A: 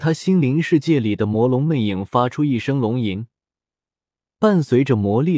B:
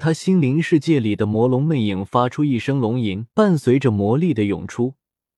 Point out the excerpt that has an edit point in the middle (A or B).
B